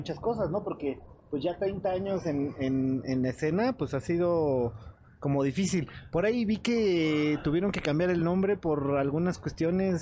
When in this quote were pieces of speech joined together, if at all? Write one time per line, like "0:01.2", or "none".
none